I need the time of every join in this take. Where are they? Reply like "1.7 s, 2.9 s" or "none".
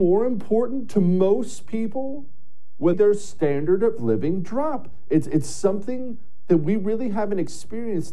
2.9 s

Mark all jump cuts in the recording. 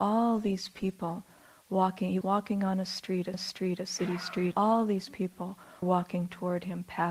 2.2 s, 3.3 s, 4.5 s, 5.8 s

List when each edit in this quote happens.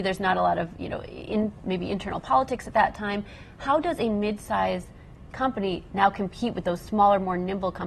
none

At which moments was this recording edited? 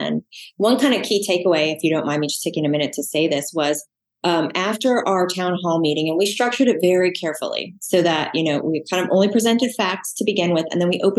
none

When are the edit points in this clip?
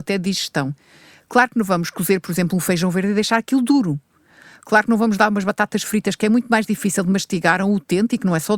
none

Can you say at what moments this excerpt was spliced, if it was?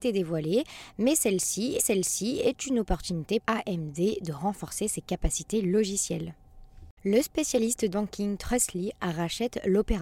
1.8 s, 3.4 s, 7.0 s, 7.9 s

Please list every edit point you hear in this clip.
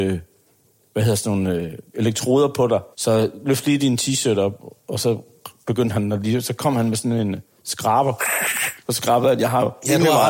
2.9 s, 8.8 s

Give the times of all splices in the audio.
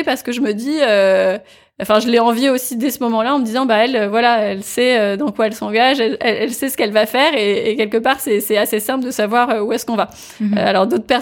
none

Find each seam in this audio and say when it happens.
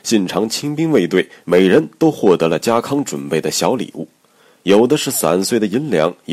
none

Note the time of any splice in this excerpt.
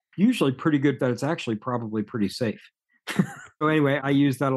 1.0 s, 3.6 s

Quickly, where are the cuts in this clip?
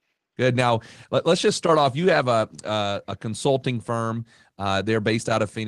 none

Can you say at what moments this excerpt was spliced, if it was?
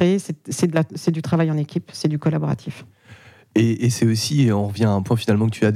none

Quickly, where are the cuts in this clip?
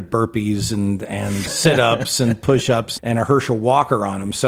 1.5 s, 3.0 s

